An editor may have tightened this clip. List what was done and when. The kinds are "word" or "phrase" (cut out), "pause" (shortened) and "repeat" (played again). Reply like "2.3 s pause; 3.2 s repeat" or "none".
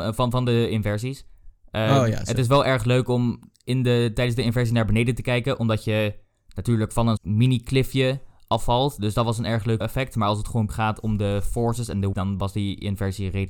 7.2 s word; 9.8 s word; 10.7 s word; 12.1 s word